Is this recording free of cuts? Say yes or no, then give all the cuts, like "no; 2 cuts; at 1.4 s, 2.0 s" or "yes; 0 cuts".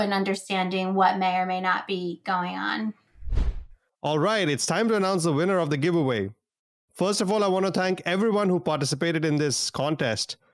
yes; 0 cuts